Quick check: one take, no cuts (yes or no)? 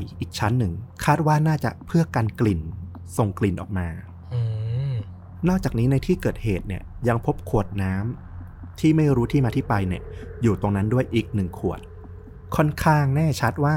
yes